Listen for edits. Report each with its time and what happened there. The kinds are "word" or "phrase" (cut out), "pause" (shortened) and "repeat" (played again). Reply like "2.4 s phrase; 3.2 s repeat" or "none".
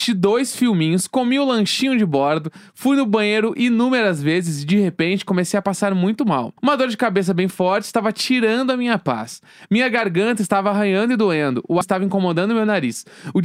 6.6 s pause; 11.8 s phrase

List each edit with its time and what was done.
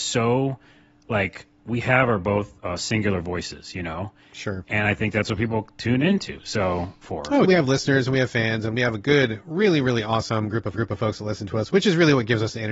7.4 s phrase; 10.7 s repeat

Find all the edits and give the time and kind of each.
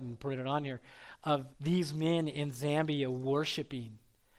1.5 s pause

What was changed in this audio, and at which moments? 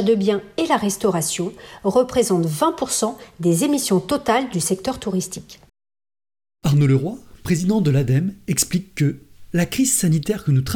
none

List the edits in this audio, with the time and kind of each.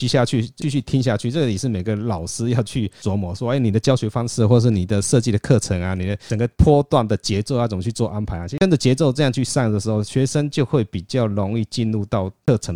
none

